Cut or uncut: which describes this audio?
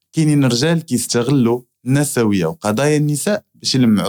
uncut